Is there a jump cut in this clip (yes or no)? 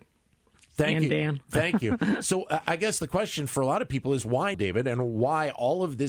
yes